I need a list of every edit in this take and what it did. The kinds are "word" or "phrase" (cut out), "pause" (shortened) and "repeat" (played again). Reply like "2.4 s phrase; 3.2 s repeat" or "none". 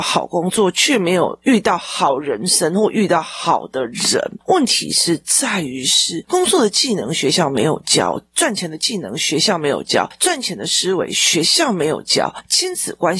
1.4 s pause